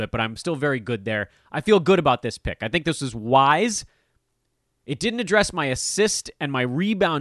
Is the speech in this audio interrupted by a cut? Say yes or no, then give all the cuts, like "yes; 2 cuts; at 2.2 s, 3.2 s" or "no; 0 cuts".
no; 0 cuts